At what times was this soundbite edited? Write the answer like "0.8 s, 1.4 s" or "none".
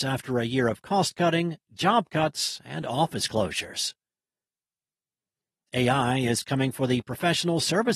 none